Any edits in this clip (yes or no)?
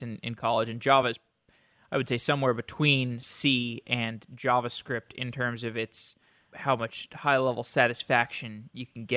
no